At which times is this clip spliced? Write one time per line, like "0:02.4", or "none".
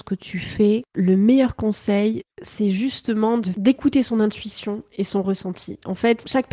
none